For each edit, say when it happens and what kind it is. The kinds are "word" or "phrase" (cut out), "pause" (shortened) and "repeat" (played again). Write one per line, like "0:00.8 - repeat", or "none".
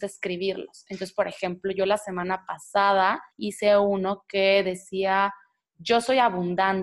0:03.3 - pause